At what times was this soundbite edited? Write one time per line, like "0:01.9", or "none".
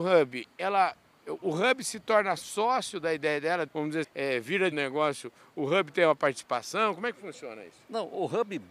0:03.7
0:04.0
0:04.7